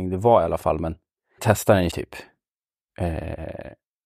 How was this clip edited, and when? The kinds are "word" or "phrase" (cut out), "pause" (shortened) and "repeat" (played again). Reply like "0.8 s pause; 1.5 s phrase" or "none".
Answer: 1.4 s phrase; 1.9 s word

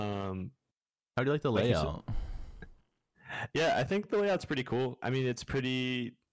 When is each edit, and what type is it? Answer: none

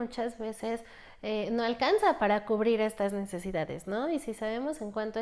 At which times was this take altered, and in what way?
2.2 s word

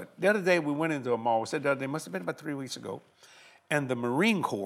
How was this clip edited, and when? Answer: none

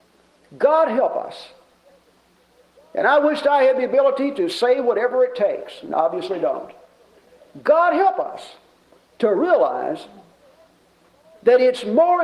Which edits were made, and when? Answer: none

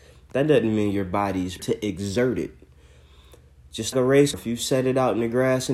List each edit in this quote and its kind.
1.6 s word; 3.9 s word; 4.3 s word

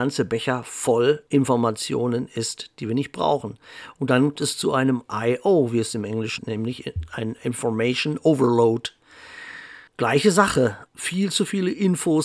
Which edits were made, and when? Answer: 1.3 s pause; 4.4 s word; 6.4 s word; 9.9 s pause; 10.9 s pause

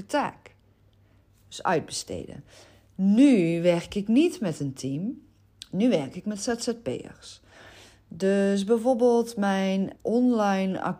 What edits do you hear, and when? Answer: 10.0 s word

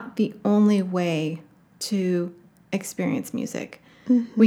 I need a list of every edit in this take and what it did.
none

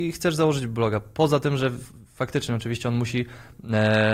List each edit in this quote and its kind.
none

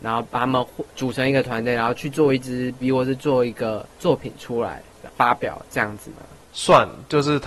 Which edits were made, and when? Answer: 0.9 s pause; 2.8 s word; 3.9 s pause; 6.4 s pause

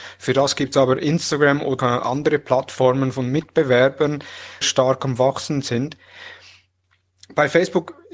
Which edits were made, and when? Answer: 1.8 s phrase; 4.6 s phrase

